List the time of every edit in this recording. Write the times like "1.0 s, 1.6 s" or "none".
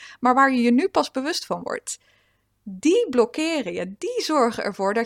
none

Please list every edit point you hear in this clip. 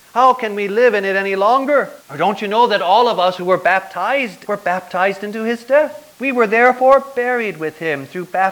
2.0 s, 4.5 s, 6.1 s

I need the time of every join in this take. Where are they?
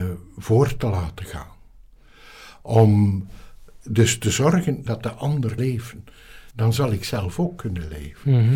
4.9 s, 5.6 s, 6.5 s

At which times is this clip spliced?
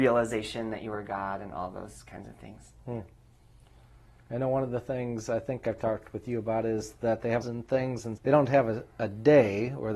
7.4 s, 8.2 s

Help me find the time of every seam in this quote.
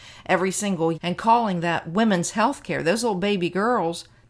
0.9 s

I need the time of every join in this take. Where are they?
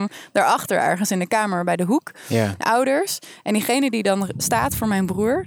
2.6 s

